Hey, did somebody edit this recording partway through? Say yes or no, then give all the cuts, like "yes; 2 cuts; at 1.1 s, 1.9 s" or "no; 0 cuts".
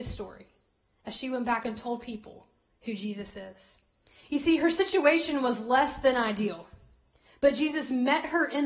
no; 0 cuts